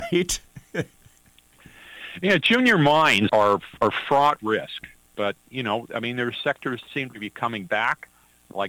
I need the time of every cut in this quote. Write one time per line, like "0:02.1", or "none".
0:03.3
0:04.4
0:06.8